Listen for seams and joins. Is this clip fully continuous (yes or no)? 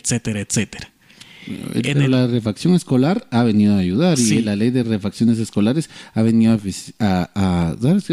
yes